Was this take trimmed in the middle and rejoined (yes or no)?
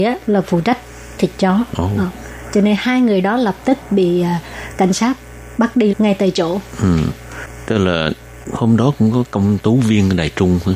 yes